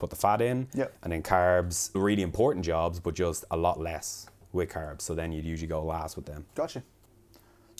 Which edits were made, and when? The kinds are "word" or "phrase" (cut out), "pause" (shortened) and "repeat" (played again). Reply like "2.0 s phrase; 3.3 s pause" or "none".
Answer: 1.9 s word; 6.5 s pause